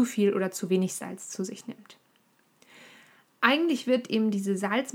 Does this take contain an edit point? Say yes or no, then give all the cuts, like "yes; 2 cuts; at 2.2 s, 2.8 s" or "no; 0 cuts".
no; 0 cuts